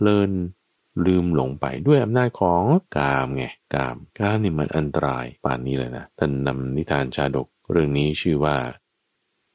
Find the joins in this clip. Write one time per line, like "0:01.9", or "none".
0:02.9
0:03.6
0:04.1
0:05.4
0:06.1
0:07.6